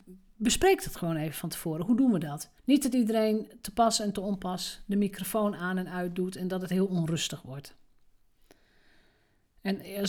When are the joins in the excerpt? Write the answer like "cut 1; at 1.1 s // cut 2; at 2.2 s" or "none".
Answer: cut 1; at 2.6 s